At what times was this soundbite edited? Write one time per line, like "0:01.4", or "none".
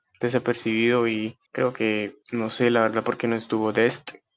0:01.5
0:02.2